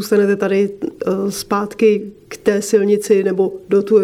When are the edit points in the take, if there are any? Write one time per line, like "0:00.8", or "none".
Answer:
none